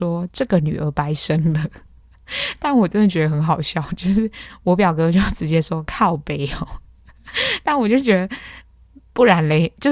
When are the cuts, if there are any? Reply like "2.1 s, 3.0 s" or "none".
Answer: none